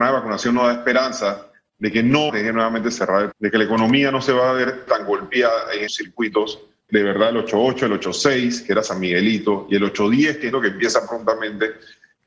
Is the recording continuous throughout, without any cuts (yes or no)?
no